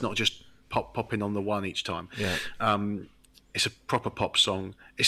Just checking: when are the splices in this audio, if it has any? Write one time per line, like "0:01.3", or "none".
none